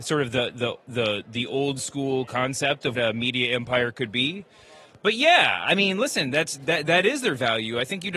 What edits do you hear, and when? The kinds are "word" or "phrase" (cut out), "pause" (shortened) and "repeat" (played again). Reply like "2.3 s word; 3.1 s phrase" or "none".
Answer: 2.9 s word